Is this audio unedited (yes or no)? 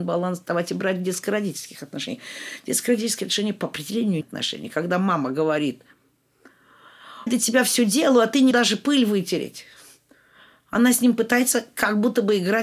no